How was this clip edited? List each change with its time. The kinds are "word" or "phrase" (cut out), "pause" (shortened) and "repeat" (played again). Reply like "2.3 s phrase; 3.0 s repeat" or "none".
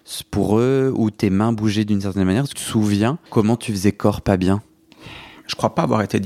2.5 s phrase; 3.3 s pause